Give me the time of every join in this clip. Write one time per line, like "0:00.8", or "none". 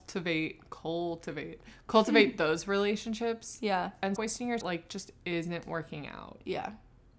0:04.2
0:04.6